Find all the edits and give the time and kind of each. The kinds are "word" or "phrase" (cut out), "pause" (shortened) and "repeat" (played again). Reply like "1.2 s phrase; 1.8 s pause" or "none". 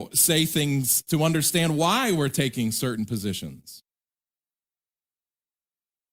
1.1 s word